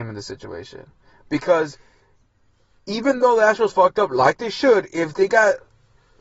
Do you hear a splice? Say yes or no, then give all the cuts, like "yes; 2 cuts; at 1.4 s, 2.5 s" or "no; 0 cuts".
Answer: no; 0 cuts